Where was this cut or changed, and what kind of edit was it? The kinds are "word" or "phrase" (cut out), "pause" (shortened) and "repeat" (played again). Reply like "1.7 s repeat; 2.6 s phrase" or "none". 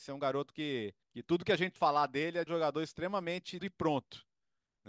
1.0 s pause; 1.8 s word; 2.5 s word; 3.6 s word

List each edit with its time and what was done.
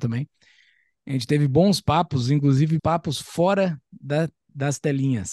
2.8 s word

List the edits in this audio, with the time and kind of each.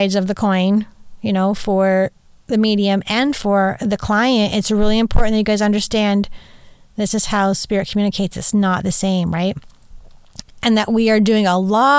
none

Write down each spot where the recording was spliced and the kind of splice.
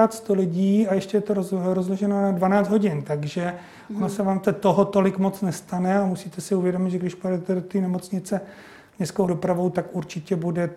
4.4 s word; 9.3 s word

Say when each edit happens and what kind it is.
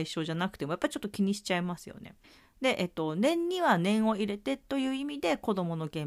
2.2 s pause

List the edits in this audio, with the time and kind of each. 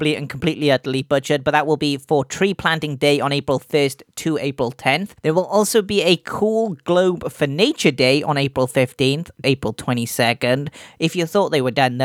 5.2 s pause; 9.4 s word

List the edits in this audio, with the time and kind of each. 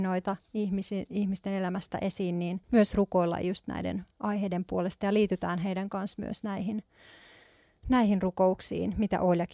2.6 s pause

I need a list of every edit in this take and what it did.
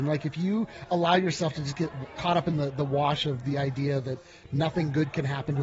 none

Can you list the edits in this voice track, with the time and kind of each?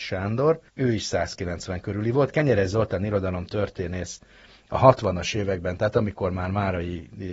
none

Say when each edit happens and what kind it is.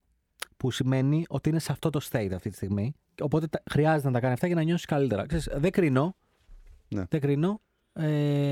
3.0 s pause

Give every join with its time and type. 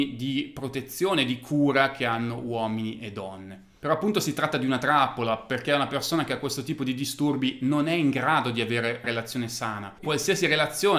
9.0 s word; 10.0 s word

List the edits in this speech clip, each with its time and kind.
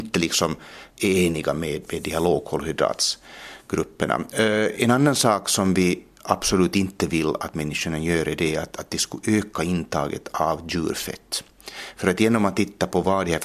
0.9 s pause

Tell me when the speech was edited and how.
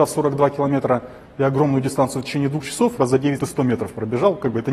3.0 s word; 3.4 s word

